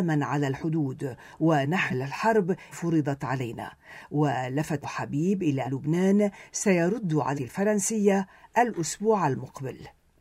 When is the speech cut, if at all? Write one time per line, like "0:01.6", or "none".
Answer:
0:01.9
0:02.7
0:04.8
0:05.6
0:07.3